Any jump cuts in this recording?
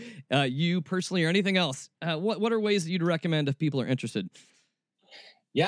no; 0 cuts

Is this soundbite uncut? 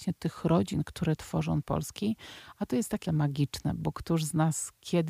no; 2 cuts; at 1.6 s, 3.1 s

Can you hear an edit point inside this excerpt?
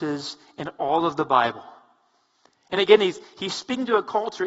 no; 0 cuts

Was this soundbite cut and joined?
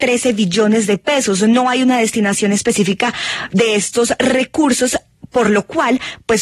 no; 0 cuts

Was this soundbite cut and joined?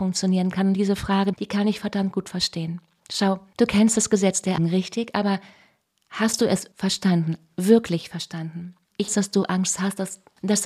yes; 4 cuts; at 1.3 s, 4.6 s, 6.7 s, 9.1 s

